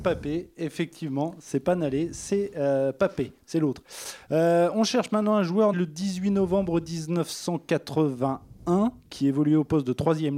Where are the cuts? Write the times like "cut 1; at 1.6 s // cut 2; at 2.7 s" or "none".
cut 1; at 5.7 s